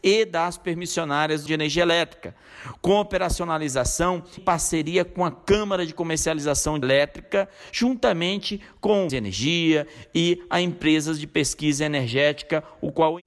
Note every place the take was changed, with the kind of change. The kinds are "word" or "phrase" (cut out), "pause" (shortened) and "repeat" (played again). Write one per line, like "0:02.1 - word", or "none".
0:01.5 - phrase
0:04.4 - word
0:06.8 - word
0:09.1 - phrase